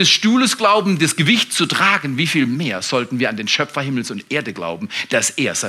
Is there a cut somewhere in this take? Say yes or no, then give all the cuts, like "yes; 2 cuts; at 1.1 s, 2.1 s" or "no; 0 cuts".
no; 0 cuts